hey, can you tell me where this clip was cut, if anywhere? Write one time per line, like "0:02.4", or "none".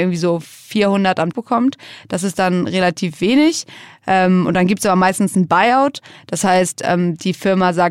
0:01.3